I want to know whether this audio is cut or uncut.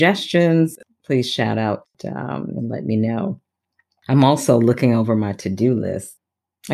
uncut